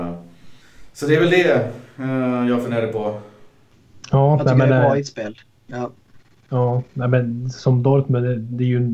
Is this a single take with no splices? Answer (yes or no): yes